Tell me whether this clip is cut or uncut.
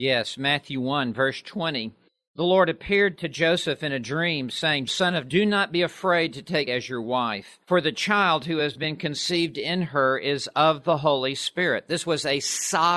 cut